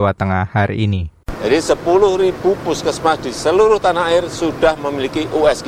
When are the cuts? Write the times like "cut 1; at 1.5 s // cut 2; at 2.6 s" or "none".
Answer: none